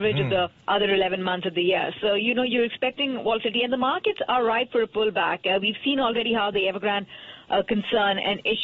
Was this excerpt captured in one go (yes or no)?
yes